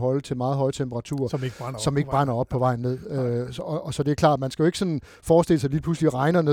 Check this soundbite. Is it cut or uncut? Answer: uncut